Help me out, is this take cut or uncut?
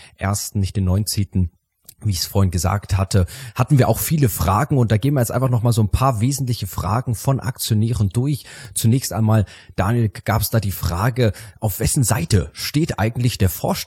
uncut